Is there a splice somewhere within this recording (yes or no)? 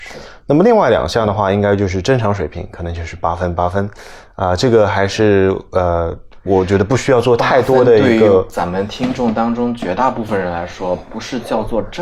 no